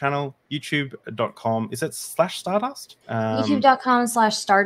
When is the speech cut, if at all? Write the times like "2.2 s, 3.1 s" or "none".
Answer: 3.0 s